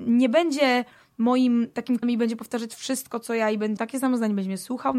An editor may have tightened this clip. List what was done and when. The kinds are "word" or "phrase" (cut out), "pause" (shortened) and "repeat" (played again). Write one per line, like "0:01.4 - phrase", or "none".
0:02.0 - word
0:03.8 - word

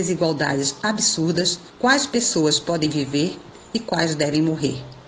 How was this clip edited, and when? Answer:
0:01.7 - pause

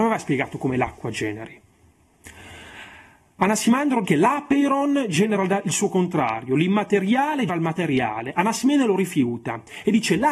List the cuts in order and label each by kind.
0:04.0 - word
0:07.5 - word

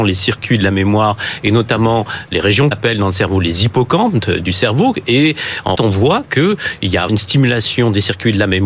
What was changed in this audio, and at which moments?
0:02.7 - word
0:05.8 - word
0:07.1 - word

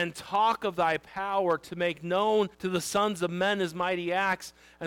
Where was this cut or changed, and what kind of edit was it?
0:02.5 - pause

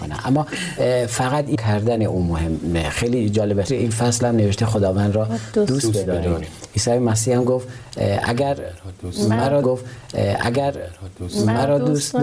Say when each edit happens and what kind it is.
0:01.5 - phrase
0:03.7 - phrase
0:09.6 - repeat

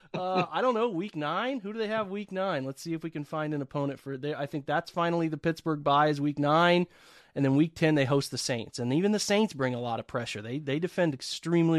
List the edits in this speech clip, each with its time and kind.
none

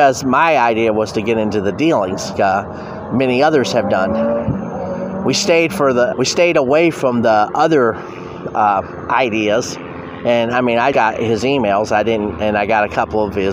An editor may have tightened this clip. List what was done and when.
0:02.3 - word
0:06.1 - word
0:10.9 - word

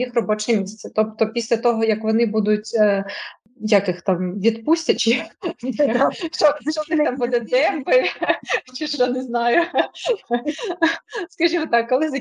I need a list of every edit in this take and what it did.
none

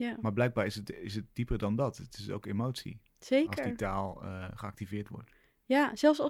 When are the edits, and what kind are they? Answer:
none

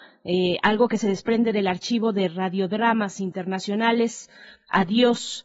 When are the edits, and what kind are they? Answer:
none

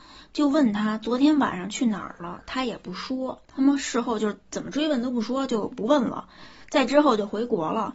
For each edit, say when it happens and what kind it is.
0:03.4 - pause

